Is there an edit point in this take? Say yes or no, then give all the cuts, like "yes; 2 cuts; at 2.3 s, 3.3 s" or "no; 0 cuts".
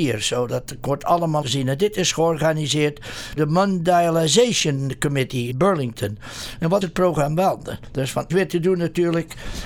yes; 5 cuts; at 1.4 s, 3.4 s, 5.5 s, 6.8 s, 8.3 s